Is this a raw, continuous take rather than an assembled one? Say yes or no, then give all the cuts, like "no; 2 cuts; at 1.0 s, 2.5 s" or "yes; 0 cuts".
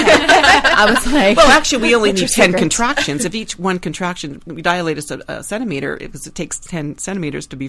yes; 0 cuts